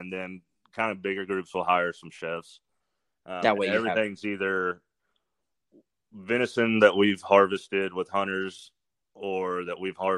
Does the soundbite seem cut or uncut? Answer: uncut